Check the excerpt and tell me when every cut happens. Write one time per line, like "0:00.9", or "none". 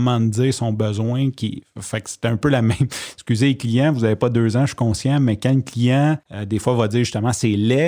0:06.2